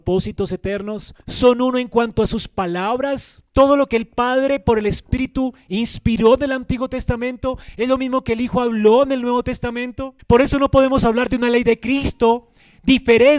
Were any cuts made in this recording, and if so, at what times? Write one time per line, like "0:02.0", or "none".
0:01.2
0:03.5
0:10.2